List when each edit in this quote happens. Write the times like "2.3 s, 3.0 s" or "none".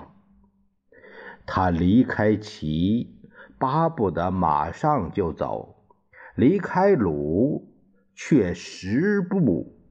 none